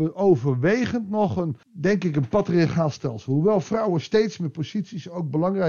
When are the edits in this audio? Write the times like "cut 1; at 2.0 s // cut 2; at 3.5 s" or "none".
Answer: cut 1; at 1.6 s